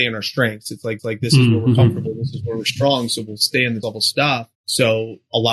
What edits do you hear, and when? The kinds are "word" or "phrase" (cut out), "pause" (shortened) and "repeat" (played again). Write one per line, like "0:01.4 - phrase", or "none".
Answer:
0:01.0 - repeat
0:03.8 - word
0:04.5 - pause